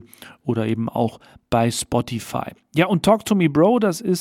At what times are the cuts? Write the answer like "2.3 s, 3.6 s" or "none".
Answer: none